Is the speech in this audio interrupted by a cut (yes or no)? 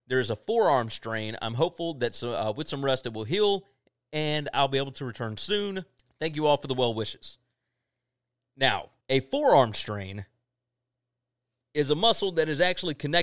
yes